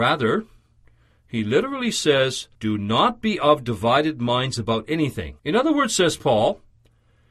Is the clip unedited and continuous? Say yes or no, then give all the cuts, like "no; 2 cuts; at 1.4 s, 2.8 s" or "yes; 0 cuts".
no; 2 cuts; at 2.5 s, 5.4 s